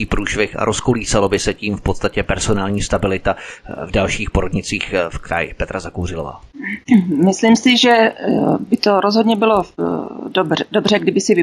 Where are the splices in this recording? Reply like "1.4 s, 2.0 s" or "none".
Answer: none